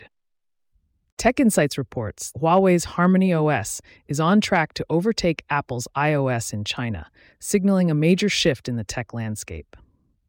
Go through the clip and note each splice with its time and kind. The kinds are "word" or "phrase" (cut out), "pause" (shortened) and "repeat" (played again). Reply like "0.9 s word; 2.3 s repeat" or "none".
2.3 s word